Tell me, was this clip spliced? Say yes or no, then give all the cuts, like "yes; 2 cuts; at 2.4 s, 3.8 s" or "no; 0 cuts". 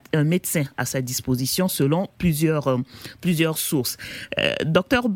no; 0 cuts